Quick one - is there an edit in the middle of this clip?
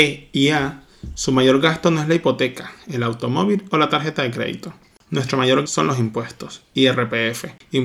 yes; 1 cut; at 5.7 s

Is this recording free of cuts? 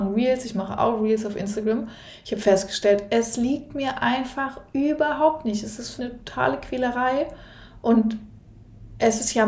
no; 1 cut; at 6.0 s

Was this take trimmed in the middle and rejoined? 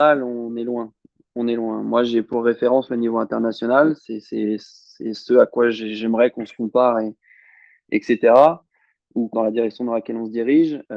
yes; 1 cut; at 9.3 s

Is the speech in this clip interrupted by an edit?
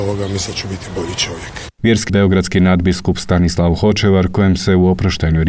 yes; 1 cut; at 2.1 s

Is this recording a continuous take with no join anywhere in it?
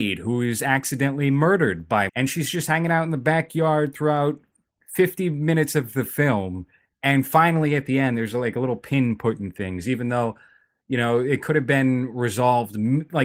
no; 1 cut; at 2.1 s

